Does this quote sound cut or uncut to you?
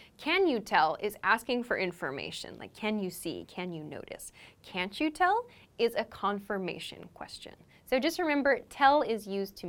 uncut